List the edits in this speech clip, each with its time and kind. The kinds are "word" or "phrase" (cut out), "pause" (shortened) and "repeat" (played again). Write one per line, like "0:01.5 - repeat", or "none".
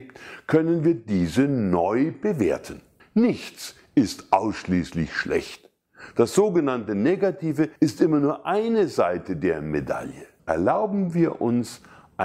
0:03.0 - pause
0:07.8 - pause
0:10.4 - pause